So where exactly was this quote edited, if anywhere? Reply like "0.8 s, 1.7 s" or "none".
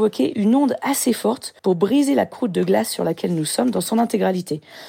1.6 s